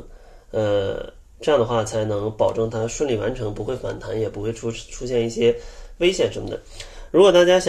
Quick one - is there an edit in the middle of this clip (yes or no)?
no